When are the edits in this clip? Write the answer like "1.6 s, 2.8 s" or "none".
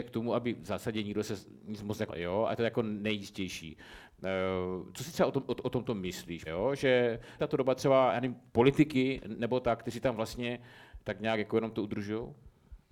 2.1 s, 6.5 s, 7.4 s, 8.5 s